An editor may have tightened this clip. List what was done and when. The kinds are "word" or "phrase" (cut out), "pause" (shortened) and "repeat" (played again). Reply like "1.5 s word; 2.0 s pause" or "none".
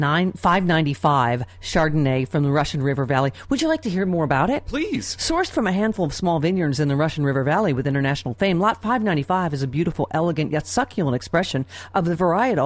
none